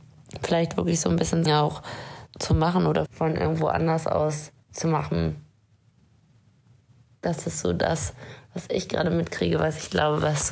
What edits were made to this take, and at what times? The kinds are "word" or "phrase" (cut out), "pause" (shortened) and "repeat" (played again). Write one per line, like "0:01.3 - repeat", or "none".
0:01.5 - phrase
0:02.3 - word
0:03.1 - phrase
0:04.6 - pause